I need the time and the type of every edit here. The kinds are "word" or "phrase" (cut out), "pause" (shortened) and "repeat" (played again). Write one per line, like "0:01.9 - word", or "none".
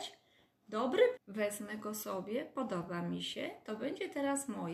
0:01.2 - word

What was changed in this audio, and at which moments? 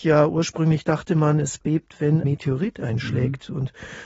0:02.2 - word

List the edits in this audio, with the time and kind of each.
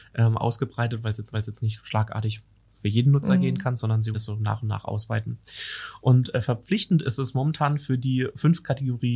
0:01.3 - repeat
0:04.1 - word

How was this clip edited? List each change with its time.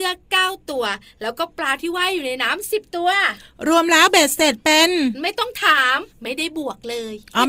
0:06.1 - pause

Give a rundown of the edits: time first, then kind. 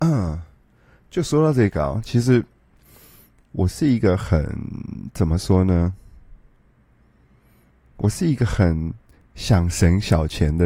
none

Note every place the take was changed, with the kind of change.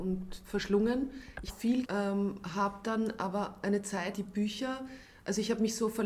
0:01.5 - word
0:01.8 - word
0:04.1 - phrase

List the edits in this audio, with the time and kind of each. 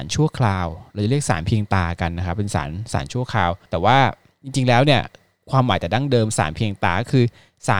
0:03.7 - pause

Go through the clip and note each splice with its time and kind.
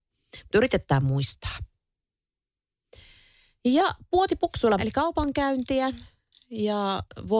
0:04.8 - word

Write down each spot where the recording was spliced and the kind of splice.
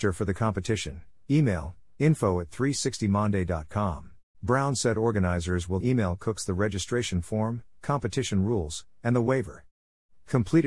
0:04.3 - pause
0:05.8 - word

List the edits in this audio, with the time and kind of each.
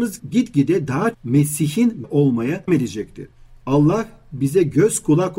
0:01.1 - word
0:02.0 - word
0:02.7 - word

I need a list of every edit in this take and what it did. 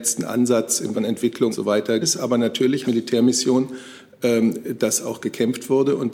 0:00.9 - word
0:01.5 - word
0:02.0 - word
0:02.8 - word

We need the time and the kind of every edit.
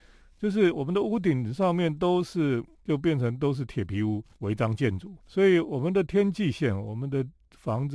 0:02.7 - pause
0:04.3 - pause

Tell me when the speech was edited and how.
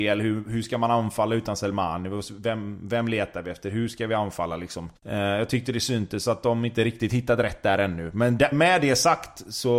0:05.0 - pause
0:08.5 - word

